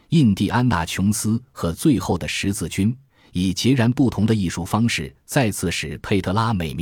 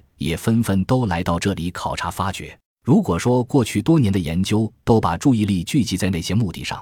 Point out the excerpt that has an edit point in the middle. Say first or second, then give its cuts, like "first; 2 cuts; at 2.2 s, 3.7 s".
second; 1 cut; at 2.6 s